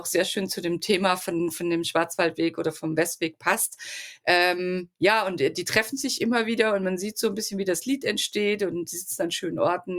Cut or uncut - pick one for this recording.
uncut